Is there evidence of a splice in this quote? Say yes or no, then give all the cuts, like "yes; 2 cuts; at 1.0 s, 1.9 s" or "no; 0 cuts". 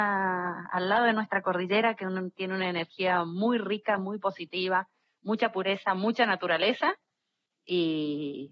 no; 0 cuts